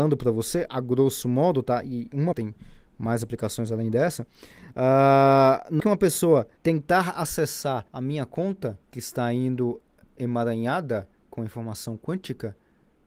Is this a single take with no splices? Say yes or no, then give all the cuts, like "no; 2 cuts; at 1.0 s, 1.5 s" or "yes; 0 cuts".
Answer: no; 6 cuts; at 2.3 s, 5.8 s, 6.6 s, 7.9 s, 8.8 s, 11.2 s